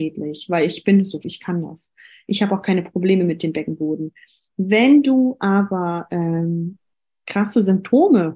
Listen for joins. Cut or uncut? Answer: cut